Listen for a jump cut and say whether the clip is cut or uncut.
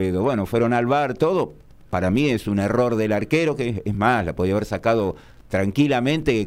uncut